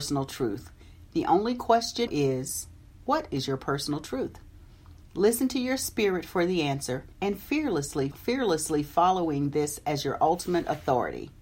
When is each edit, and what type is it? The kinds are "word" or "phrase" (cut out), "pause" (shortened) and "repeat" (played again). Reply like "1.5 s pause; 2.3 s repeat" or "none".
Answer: 2.1 s word; 7.1 s pause; 8.1 s word

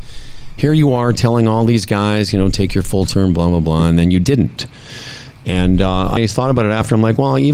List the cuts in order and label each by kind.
6.2 s word

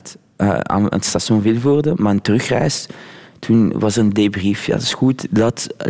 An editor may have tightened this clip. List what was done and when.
none

